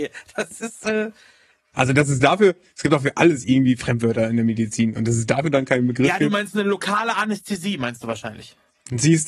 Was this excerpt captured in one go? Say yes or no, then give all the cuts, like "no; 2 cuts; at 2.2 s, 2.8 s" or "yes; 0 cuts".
yes; 0 cuts